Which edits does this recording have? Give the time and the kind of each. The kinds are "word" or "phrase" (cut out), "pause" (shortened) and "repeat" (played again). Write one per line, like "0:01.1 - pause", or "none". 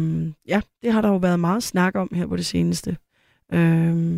none